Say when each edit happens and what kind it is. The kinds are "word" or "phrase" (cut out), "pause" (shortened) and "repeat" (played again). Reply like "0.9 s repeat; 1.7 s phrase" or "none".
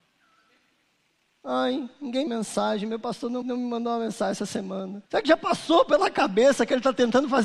2.3 s phrase; 3.4 s word; 5.1 s pause